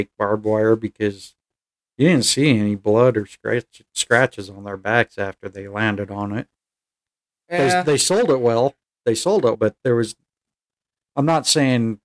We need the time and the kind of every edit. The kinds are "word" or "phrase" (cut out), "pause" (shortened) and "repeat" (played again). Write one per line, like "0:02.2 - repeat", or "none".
0:09.5 - word